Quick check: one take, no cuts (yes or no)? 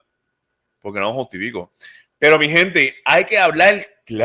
yes